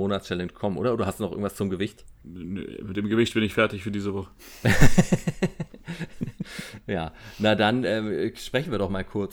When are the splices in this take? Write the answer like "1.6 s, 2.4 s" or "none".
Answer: 2.2 s